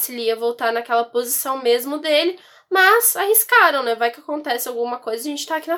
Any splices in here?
no; 0 cuts

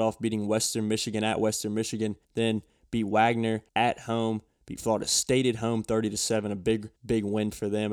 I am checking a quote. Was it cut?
yes; 3 cuts; at 2.2 s, 3.7 s, 7.0 s

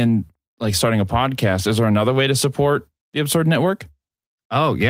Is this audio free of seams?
yes; 0 cuts

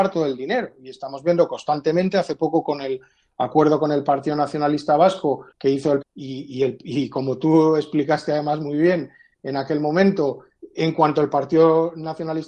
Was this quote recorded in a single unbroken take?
no; 2 cuts; at 5.5 s, 6.0 s

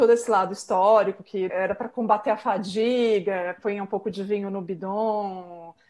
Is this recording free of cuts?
no; 1 cut; at 1.5 s

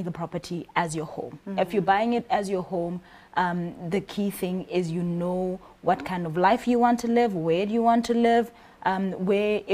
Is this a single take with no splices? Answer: yes; 0 cuts

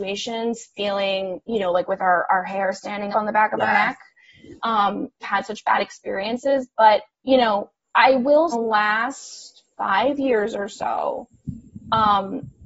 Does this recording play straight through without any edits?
no; 5 cuts; at 3.1 s, 5.2 s, 7.1 s, 7.8 s, 8.5 s

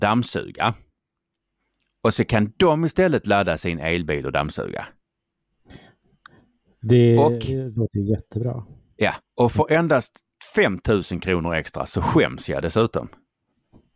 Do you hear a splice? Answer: no; 0 cuts

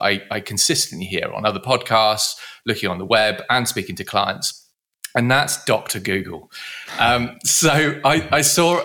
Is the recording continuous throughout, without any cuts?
yes; 0 cuts

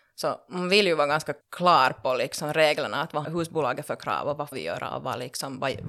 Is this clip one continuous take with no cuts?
no; 3 cuts; at 1.4 s, 3.2 s, 4.5 s

